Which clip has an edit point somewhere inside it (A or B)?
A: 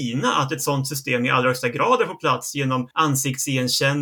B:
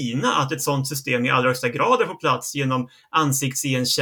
A